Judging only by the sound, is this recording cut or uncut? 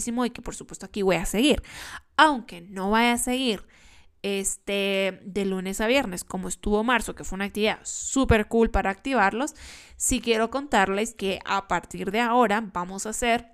uncut